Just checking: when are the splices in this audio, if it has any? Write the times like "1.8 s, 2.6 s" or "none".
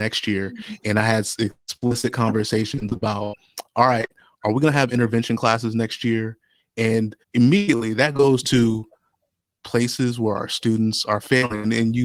7.2 s